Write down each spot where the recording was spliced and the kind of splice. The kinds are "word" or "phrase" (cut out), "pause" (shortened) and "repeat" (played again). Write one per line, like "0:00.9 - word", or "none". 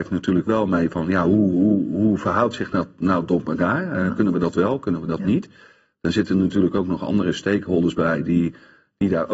none